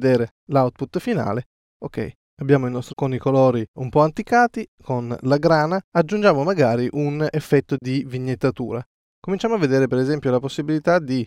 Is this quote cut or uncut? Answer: cut